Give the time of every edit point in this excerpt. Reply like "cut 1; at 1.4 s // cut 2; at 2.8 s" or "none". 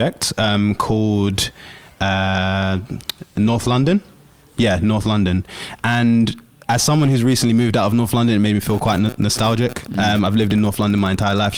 none

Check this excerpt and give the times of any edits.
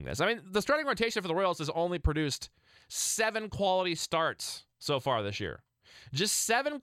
none

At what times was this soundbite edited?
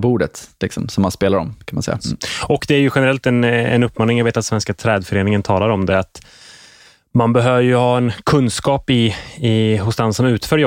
none

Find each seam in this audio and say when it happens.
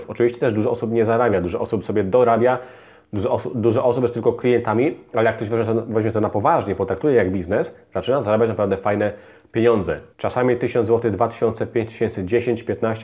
cut 1; at 10.1 s

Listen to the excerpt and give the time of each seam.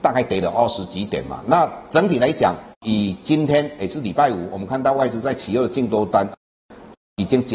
cut 1; at 2.7 s

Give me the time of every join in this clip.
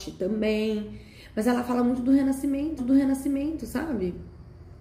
cut 1; at 2.8 s

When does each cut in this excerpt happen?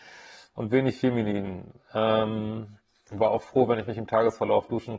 none

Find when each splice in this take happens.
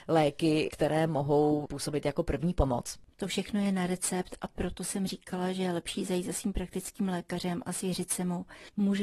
none

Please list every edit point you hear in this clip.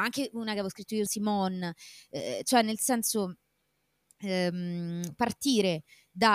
cut 1; at 1.1 s

